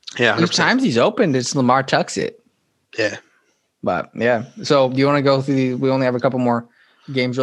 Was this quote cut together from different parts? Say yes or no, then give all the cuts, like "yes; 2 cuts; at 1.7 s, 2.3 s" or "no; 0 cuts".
no; 0 cuts